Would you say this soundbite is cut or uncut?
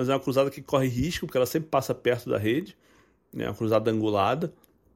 uncut